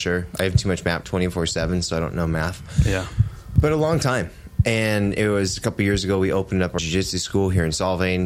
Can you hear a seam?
yes; 2 cuts; at 1.0 s, 6.8 s

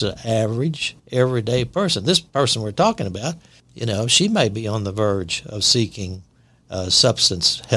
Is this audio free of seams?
no; 2 cuts; at 1.0 s, 3.6 s

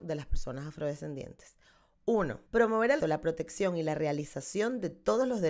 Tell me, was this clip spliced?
yes; 2 cuts; at 2.5 s, 3.0 s

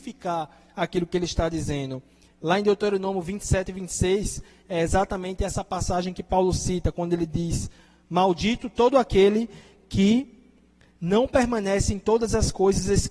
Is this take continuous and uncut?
yes; 0 cuts

